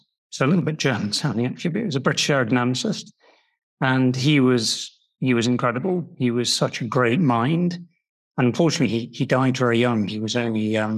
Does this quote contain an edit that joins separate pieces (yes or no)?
no